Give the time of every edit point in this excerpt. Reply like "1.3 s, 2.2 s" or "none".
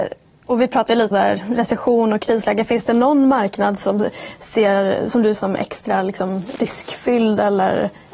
1.1 s, 5.3 s